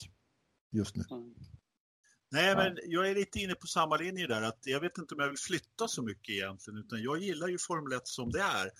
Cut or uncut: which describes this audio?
cut